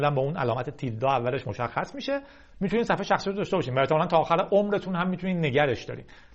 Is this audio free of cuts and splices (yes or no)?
yes